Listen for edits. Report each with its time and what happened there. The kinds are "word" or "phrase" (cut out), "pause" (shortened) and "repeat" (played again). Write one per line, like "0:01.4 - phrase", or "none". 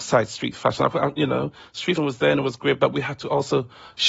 0:02.0 - word

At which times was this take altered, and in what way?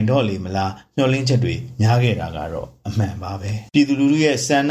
0:03.7 - pause

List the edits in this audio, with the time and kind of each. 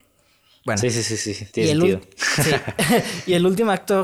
0:01.5 - pause

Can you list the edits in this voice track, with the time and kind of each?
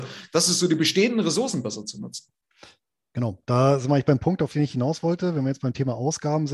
none

